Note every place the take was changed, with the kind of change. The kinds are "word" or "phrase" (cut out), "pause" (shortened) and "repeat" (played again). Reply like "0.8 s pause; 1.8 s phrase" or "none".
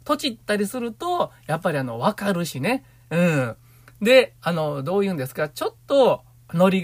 5.8 s pause